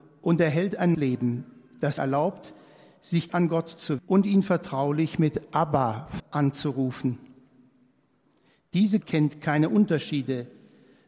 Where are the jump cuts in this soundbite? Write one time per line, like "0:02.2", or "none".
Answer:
0:00.9
0:02.0
0:03.3
0:04.0
0:06.2
0:09.0